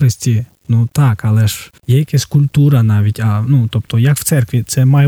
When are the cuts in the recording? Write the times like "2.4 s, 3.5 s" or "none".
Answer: 1.8 s